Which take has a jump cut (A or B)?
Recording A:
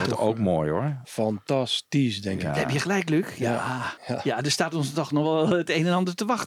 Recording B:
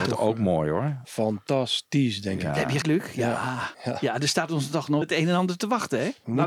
B